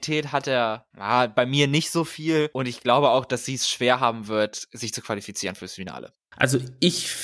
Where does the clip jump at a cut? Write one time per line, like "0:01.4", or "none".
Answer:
none